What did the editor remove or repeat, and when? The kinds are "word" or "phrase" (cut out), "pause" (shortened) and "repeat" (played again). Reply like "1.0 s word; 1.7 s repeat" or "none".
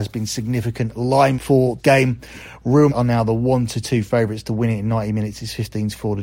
1.3 s word; 1.8 s word; 2.9 s word